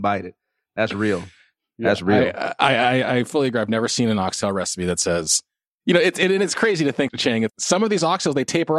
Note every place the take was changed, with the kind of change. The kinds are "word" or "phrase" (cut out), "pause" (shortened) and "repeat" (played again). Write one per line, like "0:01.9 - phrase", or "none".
0:07.1 - word
0:07.5 - word